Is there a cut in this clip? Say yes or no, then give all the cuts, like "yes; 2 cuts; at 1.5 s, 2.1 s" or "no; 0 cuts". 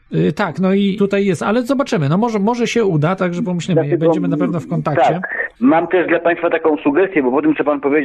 yes; 3 cuts; at 1.0 s, 3.2 s, 5.6 s